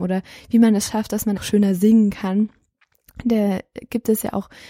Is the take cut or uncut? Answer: cut